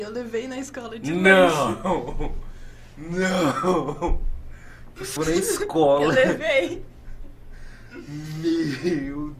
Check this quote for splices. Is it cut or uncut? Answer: cut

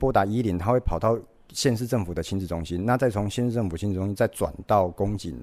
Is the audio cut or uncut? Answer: uncut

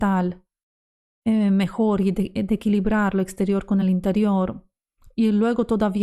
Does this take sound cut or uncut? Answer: uncut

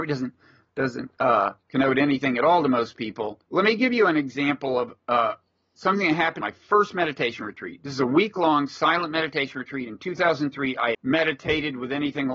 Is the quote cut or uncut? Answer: cut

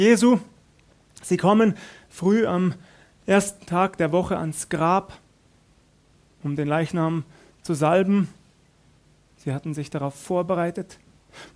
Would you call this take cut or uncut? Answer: uncut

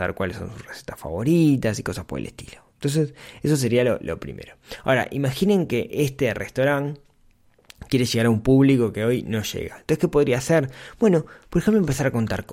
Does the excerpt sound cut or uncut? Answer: uncut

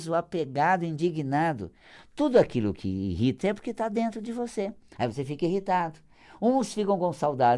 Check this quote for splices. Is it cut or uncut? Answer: cut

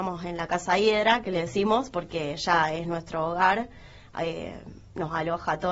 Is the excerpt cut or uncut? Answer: uncut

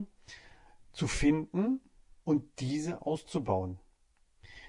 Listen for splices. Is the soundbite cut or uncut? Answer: cut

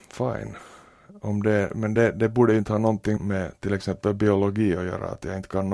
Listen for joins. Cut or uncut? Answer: uncut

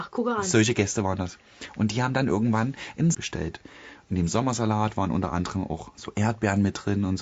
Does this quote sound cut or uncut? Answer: cut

